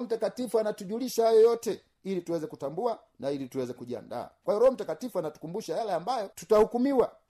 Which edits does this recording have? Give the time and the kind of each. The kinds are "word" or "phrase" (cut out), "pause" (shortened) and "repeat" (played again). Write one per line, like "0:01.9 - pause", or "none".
0:06.3 - pause